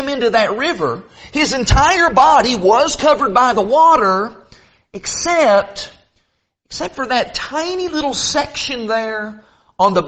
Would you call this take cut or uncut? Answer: uncut